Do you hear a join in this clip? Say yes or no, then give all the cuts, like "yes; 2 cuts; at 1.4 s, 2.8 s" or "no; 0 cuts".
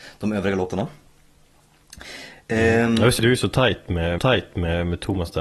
yes; 2 cuts; at 3.2 s, 4.2 s